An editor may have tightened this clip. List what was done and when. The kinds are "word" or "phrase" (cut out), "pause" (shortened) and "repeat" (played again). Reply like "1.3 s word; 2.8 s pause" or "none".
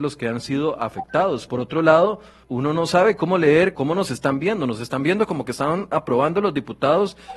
1.5 s word; 2.4 s word; 3.8 s word